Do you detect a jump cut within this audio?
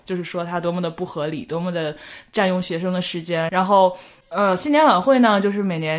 no; 0 cuts

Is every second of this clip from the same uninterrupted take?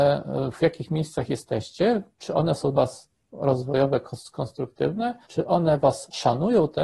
no; 3 cuts; at 2.1 s, 2.7 s, 5.2 s

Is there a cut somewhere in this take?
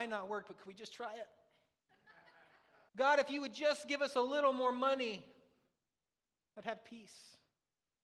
yes; 1 cut; at 2.9 s

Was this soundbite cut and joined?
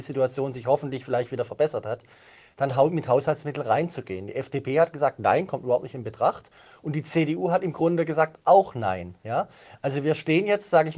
no; 0 cuts

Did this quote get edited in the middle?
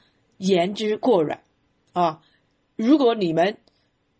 no; 0 cuts

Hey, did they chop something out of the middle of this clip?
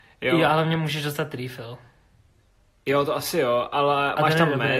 no; 0 cuts

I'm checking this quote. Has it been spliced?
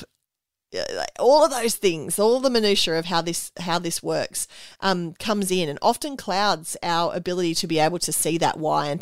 no; 0 cuts

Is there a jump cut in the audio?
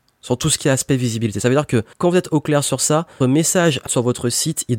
yes; 3 cuts; at 1.9 s, 3.2 s, 3.9 s

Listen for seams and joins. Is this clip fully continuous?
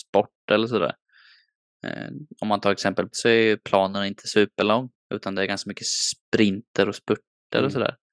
no; 2 cuts; at 3.1 s, 5.0 s

